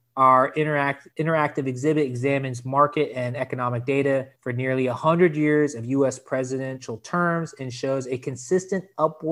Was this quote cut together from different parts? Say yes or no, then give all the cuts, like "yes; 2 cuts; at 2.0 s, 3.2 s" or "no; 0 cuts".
yes; 2 cuts; at 1.1 s, 4.3 s